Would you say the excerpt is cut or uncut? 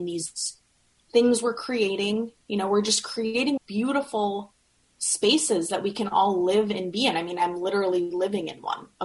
cut